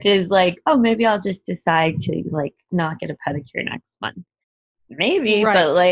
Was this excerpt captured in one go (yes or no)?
yes